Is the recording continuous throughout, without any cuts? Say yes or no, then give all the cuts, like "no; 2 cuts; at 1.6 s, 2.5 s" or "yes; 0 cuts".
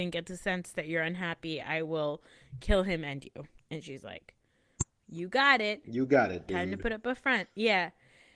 yes; 0 cuts